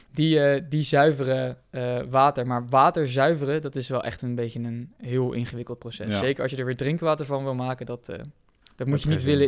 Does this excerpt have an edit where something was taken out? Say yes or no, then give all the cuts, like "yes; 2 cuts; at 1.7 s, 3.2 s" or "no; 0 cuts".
no; 0 cuts